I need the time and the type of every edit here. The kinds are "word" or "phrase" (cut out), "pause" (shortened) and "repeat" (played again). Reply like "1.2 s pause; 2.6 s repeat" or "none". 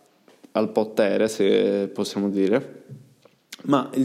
none